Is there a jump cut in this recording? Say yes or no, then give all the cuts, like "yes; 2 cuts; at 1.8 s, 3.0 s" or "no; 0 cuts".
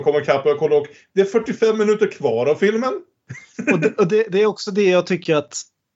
no; 0 cuts